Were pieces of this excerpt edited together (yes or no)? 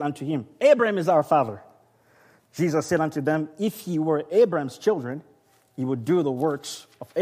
no